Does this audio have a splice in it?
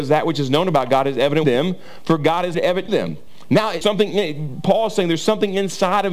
yes; 4 cuts; at 1.4 s, 2.5 s, 2.9 s, 3.8 s

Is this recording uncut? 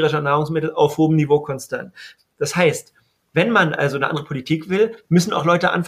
yes; 0 cuts

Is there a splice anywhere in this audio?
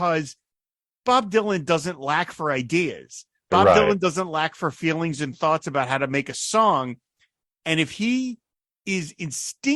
no; 0 cuts

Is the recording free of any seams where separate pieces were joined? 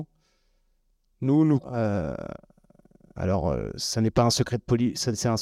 no; 1 cut; at 1.6 s

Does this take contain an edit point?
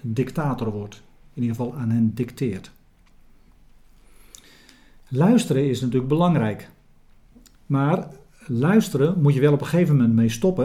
no; 0 cuts

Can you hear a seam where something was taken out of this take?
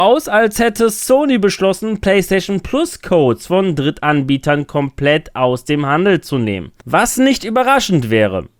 no; 0 cuts

